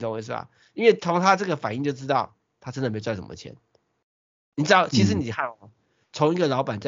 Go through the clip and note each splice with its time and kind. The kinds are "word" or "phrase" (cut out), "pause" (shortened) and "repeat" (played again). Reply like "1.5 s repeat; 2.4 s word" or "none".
none